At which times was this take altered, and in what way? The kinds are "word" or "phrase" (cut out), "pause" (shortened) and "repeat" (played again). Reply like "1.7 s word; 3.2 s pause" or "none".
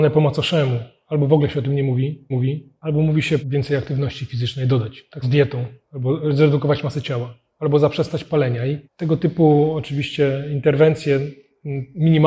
2.3 s repeat; 3.4 s word; 5.2 s word; 8.8 s pause